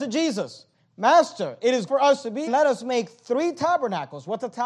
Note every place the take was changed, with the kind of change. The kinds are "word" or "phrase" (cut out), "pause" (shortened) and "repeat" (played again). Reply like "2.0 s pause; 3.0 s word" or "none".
1.9 s word; 2.5 s phrase